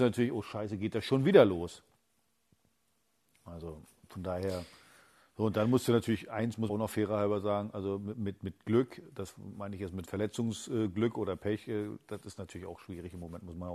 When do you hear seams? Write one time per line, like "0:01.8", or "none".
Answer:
0:06.7